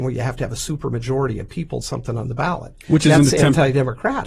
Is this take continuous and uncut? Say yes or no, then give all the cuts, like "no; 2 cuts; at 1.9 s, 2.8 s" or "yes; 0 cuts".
no; 1 cut; at 1.8 s